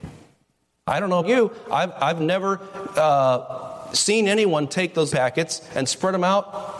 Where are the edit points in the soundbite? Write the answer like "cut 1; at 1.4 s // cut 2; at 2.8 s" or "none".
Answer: cut 1; at 1.2 s // cut 2; at 5.1 s